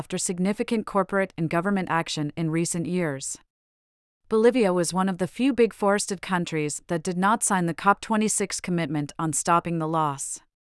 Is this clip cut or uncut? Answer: uncut